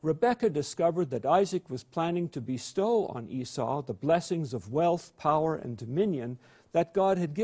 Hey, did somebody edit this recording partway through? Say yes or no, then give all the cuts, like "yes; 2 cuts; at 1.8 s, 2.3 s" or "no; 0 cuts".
no; 0 cuts